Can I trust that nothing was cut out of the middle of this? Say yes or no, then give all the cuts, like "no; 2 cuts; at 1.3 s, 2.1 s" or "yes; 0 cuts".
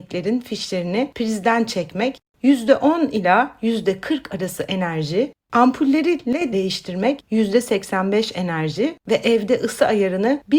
no; 3 cuts; at 5.4 s, 6.5 s, 9.0 s